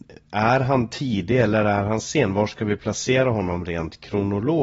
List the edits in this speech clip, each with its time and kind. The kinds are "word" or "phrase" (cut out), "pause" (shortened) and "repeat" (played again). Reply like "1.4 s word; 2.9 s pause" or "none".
none